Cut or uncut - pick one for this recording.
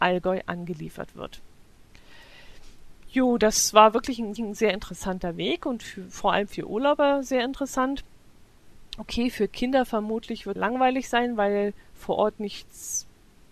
cut